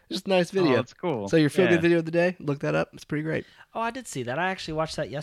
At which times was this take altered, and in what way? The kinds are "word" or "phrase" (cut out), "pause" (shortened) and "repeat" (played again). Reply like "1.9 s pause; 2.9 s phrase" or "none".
none

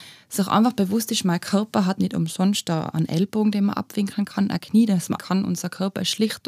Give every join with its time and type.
2.9 s word; 5.2 s word

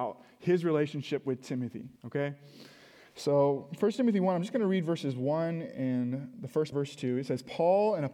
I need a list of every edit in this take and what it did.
2.0 s pause; 6.7 s phrase

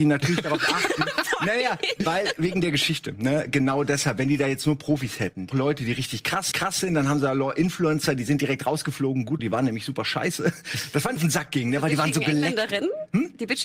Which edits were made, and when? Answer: 5.5 s phrase; 6.5 s repeat; 9.4 s word; 11.2 s phrase

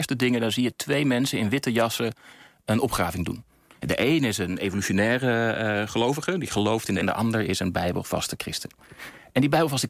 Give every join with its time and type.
7.0 s word

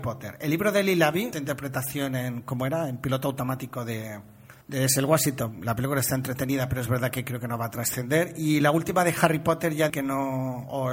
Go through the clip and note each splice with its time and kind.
1.3 s word; 4.6 s pause; 9.9 s word

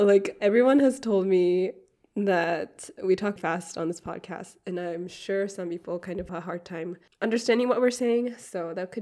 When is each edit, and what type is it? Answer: 3.0 s word; 3.4 s word; 6.3 s word

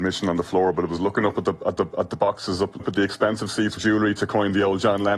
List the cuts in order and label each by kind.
1.8 s repeat; 2.8 s word; 3.8 s phrase

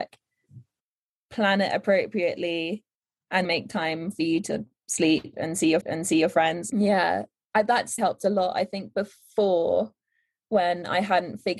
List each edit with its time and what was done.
3.4 s word; 5.8 s repeat; 8.0 s word

